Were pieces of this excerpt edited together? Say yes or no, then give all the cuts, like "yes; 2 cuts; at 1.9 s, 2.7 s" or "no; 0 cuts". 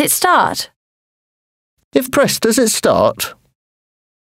yes; 2 cuts; at 2.1 s, 2.4 s